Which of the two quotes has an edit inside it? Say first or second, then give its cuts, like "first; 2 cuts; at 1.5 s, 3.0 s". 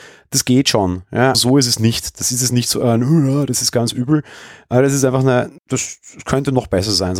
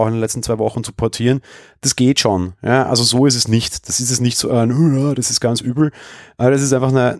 first; 2 cuts; at 1.3 s, 5.6 s